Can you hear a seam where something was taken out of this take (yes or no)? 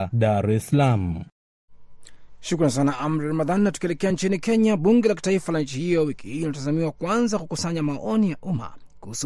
no